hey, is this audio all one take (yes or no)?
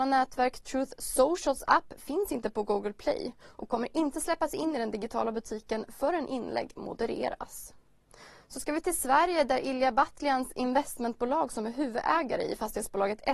yes